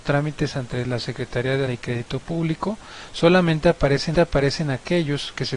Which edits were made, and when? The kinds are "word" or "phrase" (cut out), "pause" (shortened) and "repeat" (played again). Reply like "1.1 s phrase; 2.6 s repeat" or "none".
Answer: 1.7 s word; 4.1 s repeat